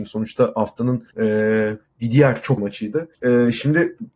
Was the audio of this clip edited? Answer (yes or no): yes